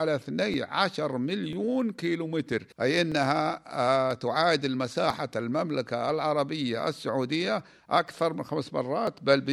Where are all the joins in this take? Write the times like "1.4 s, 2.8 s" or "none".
2.7 s